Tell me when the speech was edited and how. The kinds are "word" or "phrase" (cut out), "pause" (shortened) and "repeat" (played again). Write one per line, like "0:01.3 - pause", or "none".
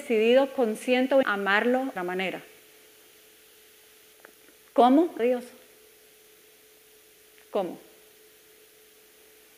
0:01.2 - word
0:02.0 - phrase
0:05.2 - phrase